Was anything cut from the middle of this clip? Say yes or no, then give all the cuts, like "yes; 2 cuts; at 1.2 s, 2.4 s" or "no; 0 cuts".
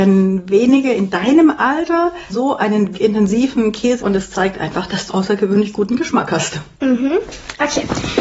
yes; 4 cuts; at 2.3 s, 2.9 s, 4.0 s, 5.1 s